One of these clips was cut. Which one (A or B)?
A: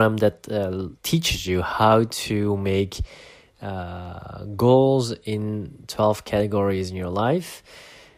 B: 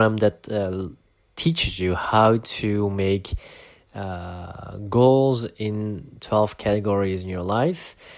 A